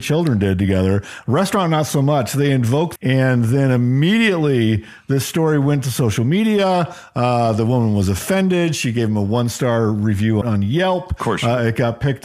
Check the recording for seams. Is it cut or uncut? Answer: cut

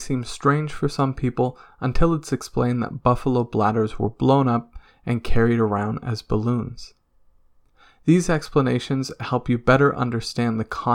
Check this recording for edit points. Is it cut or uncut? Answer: uncut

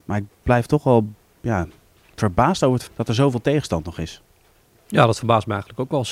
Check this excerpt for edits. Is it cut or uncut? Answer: cut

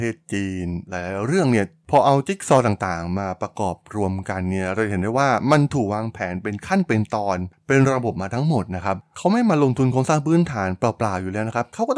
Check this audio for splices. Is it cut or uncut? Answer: uncut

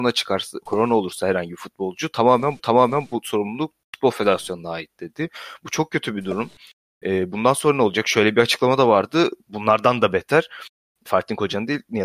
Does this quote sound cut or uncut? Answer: cut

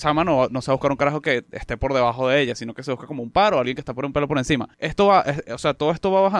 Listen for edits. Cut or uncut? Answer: cut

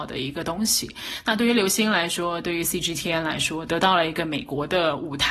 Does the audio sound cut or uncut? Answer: uncut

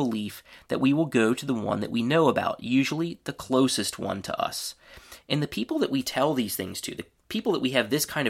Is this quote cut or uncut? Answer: uncut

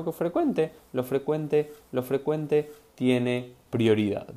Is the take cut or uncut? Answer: cut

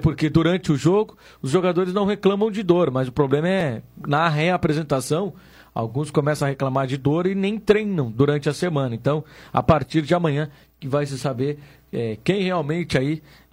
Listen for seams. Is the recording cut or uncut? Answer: uncut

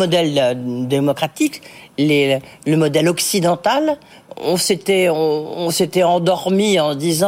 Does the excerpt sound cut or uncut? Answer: uncut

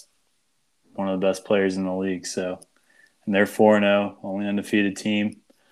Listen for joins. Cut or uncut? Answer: uncut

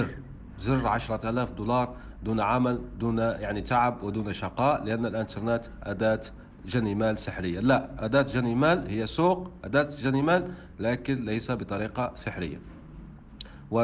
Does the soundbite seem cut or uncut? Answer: uncut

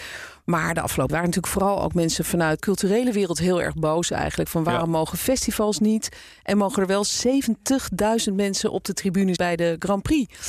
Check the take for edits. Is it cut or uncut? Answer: cut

